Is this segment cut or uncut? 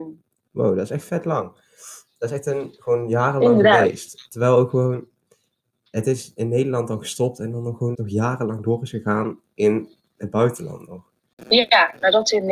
cut